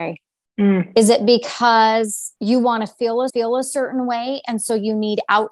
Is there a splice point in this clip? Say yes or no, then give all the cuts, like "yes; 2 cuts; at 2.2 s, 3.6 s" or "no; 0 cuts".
yes; 2 cuts; at 2.4 s, 3.3 s